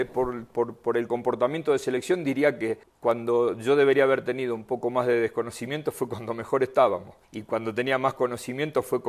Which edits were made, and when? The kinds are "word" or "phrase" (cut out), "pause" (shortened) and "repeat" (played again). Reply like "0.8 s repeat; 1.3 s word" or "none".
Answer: 2.8 s pause; 7.2 s pause